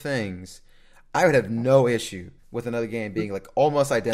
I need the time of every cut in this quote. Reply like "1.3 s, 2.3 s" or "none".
2.4 s